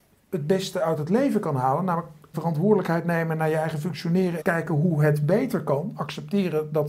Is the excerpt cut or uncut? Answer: cut